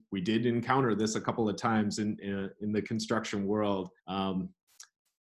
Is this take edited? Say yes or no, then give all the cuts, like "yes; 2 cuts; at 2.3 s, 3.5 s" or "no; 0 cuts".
yes; 1 cut; at 4.0 s